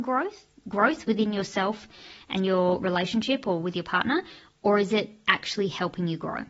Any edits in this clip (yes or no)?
no